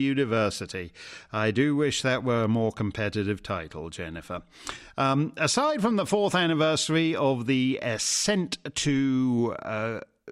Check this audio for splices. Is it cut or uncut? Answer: uncut